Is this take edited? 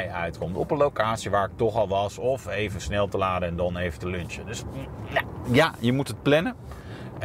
no; 0 cuts

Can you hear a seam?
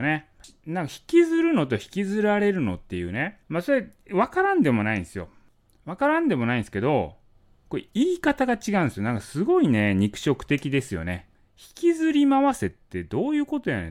yes; 1 cut; at 3.4 s

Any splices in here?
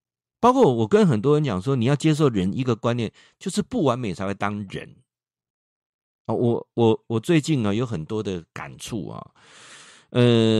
no; 0 cuts

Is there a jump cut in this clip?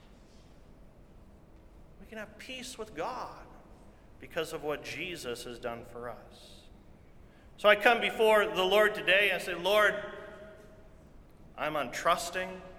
no; 0 cuts

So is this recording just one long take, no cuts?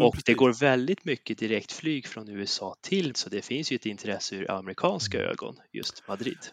no; 1 cut; at 3.1 s

